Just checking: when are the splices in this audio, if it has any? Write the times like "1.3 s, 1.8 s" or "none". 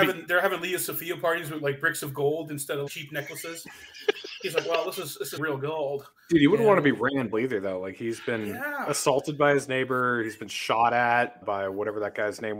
2.9 s, 5.4 s, 7.3 s, 11.4 s